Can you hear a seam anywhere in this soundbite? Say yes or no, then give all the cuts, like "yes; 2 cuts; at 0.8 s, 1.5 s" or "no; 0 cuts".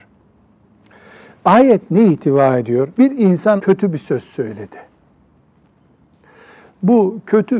yes; 2 cuts; at 2.9 s, 3.6 s